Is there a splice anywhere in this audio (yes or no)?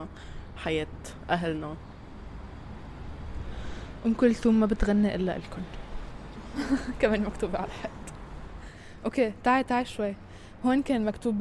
no